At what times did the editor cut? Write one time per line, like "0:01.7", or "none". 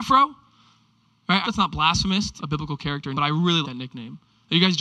0:01.4
0:02.4
0:03.1
0:03.6